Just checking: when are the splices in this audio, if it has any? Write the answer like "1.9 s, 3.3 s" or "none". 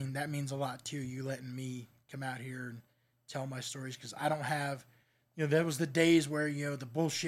none

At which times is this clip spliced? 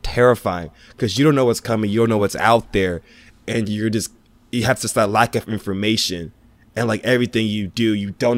none

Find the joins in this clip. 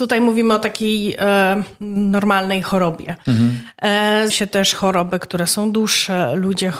4.3 s

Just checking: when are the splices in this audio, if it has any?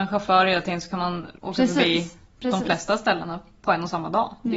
1.4 s

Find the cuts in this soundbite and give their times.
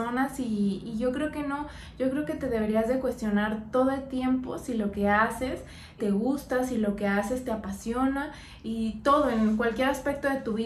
6.0 s

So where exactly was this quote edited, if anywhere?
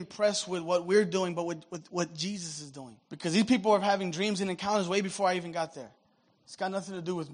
3.0 s

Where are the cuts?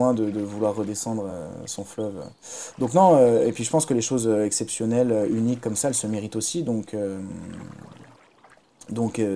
none

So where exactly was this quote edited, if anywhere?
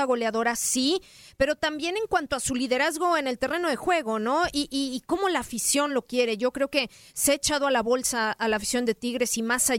none

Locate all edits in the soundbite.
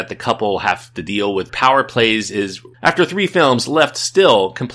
1.5 s, 2.7 s

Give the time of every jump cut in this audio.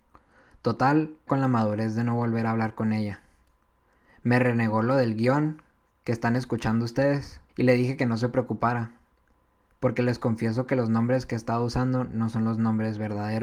1.3 s, 7.5 s

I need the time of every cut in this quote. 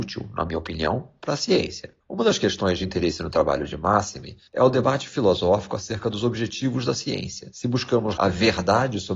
4.5 s, 8.2 s

